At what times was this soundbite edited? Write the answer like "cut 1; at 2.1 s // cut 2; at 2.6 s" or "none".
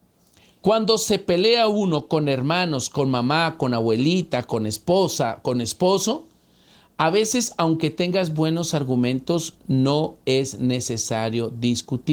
none